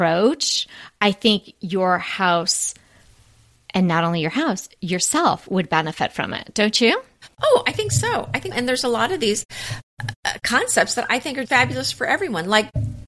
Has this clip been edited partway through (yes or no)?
yes